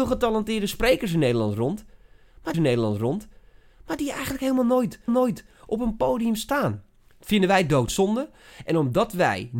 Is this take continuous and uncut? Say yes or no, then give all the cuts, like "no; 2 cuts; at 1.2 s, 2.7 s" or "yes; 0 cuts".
no; 2 cuts; at 2.5 s, 5.1 s